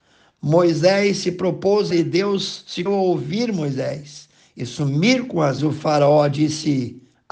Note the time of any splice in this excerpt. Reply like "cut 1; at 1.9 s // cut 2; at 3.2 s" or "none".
cut 1; at 1.9 s // cut 2; at 2.9 s // cut 3; at 5.6 s